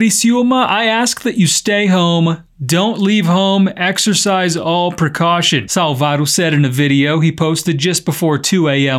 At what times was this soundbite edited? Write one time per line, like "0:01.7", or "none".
none

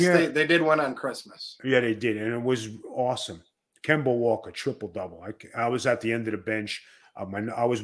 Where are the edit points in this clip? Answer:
none

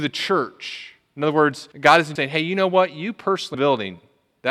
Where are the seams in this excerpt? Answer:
0:01.7
0:02.2
0:03.5

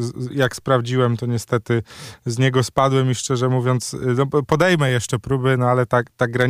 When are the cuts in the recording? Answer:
none

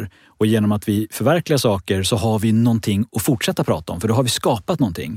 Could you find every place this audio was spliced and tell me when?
none

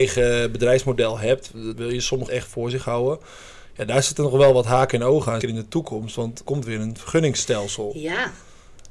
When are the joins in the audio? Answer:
0:01.7
0:02.3
0:05.4
0:06.5

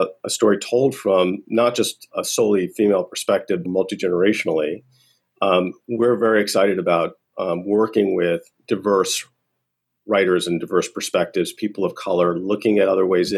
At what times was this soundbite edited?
0:02.1
0:03.7
0:08.6

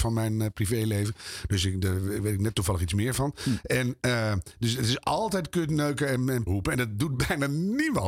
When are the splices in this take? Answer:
0:06.5

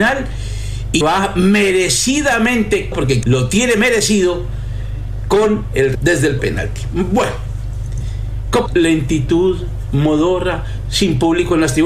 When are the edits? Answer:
0:01.0
0:02.9
0:03.2
0:05.9
0:06.4
0:08.7

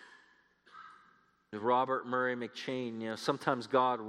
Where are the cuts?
0:01.5

